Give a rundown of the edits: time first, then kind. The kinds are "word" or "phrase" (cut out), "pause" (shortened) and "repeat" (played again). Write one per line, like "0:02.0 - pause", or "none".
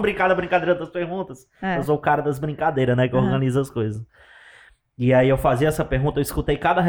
none